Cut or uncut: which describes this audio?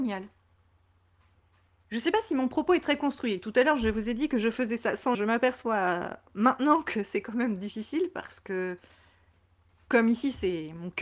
cut